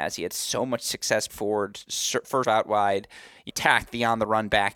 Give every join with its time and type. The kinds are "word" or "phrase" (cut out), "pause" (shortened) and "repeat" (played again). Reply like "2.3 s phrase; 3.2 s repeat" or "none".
1.3 s word; 2.4 s word; 3.5 s word